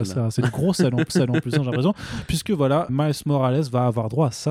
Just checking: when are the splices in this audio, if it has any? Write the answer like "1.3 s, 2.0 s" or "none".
1.1 s, 2.9 s